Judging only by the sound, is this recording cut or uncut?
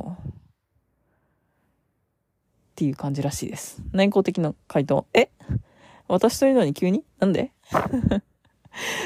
uncut